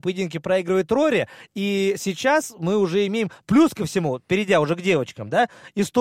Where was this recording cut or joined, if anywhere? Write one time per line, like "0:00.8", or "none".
0:03.4